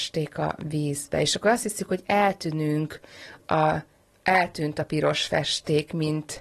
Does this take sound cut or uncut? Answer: uncut